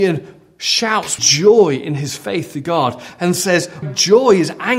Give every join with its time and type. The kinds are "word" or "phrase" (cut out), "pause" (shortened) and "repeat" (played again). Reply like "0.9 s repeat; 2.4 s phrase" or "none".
1.2 s word; 3.8 s word